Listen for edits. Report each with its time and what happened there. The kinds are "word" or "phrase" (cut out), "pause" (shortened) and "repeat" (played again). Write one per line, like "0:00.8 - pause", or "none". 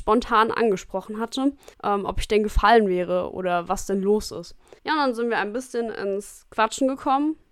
0:01.7 - pause
0:04.8 - pause